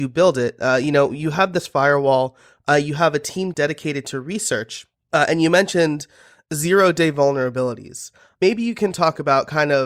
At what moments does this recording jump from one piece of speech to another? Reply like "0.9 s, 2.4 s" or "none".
none